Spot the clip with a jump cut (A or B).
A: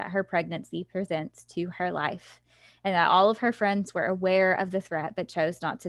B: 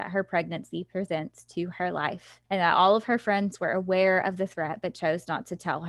B